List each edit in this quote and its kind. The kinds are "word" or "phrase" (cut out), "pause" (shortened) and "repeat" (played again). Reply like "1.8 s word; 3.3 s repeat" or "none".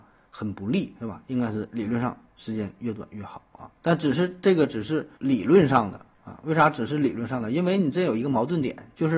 3.8 s pause; 5.2 s pause